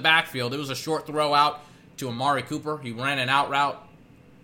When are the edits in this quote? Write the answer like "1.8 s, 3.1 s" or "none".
none